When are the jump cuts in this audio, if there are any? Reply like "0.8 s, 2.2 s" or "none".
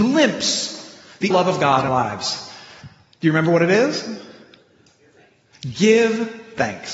1.3 s, 1.9 s